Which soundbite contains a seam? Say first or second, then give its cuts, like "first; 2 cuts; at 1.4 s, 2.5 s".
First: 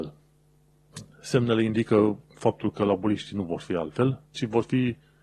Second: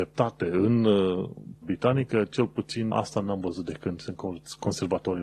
second; 2 cuts; at 1.6 s, 2.9 s